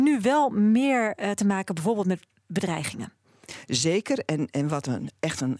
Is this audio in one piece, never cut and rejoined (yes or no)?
yes